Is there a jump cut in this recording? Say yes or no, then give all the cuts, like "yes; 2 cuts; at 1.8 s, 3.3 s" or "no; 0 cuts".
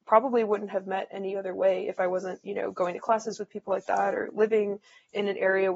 no; 0 cuts